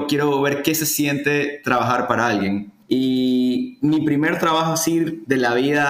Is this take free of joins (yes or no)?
no